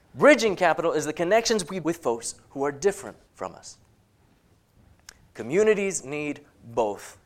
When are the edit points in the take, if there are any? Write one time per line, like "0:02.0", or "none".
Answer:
0:01.8
0:03.3